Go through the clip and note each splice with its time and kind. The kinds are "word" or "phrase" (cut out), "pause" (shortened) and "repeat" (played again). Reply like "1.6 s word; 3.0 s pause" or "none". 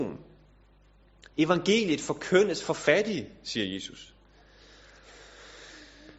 none